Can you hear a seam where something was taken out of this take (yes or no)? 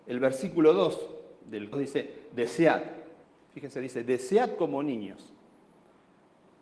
yes